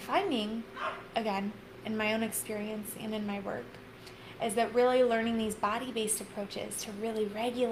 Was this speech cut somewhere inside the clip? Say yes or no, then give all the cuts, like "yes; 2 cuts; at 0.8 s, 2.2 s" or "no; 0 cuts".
no; 0 cuts